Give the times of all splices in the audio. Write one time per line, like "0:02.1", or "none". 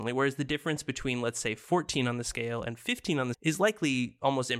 0:03.3